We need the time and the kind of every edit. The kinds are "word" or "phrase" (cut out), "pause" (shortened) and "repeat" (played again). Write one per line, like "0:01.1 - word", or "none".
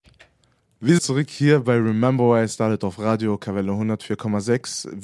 0:01.0 - phrase